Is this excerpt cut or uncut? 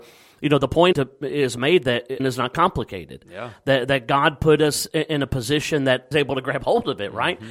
cut